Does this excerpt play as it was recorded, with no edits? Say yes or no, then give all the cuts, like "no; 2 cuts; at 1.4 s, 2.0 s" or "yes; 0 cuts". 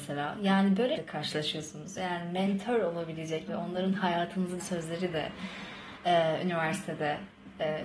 no; 3 cuts; at 1.0 s, 3.5 s, 4.6 s